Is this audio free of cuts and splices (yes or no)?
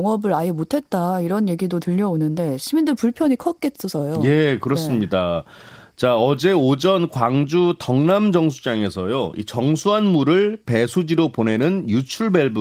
yes